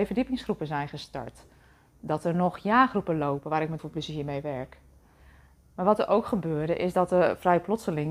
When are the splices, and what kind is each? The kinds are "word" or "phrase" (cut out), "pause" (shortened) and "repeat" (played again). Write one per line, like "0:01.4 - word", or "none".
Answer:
0:03.8 - word